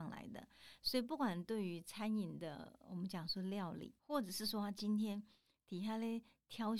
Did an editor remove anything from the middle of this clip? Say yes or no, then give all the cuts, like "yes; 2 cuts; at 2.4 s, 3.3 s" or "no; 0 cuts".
yes; 1 cut; at 4.0 s